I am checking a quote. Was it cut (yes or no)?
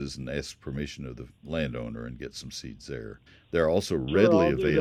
yes